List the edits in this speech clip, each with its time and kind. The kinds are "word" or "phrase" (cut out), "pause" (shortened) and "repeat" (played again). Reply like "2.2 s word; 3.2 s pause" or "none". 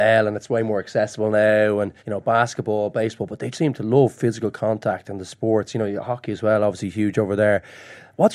2.0 s pause; 3.5 s word